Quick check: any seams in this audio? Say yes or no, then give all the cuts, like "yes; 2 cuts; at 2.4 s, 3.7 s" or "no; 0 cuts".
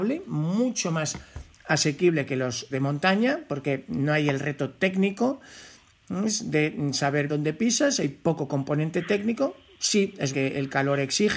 yes; 3 cuts; at 2.7 s, 7.3 s, 10.3 s